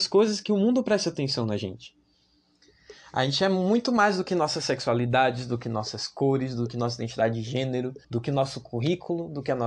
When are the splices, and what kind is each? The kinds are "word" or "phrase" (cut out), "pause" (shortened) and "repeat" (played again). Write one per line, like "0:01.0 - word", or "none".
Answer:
0:08.0 - pause